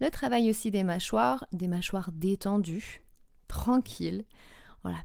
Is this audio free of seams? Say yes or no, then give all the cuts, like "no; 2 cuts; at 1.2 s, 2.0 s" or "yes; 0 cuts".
yes; 0 cuts